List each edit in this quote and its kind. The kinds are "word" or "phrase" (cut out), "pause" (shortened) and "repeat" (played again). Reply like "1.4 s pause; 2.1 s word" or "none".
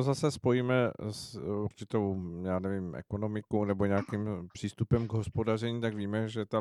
none